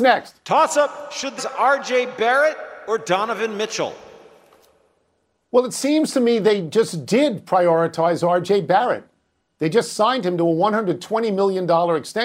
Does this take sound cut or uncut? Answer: cut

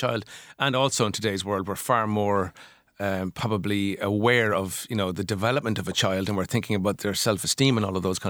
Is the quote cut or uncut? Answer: uncut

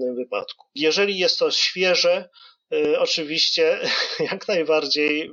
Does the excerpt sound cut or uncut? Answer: uncut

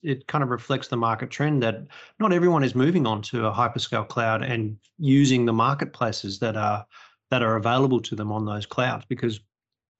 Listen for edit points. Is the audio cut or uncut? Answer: uncut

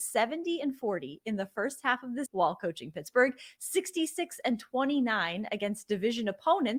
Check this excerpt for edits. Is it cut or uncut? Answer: cut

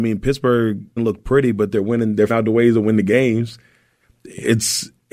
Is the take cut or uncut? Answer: cut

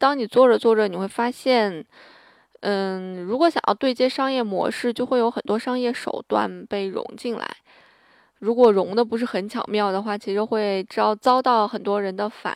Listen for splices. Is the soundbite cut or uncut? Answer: uncut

